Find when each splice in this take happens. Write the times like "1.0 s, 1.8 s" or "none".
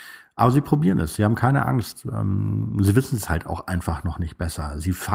none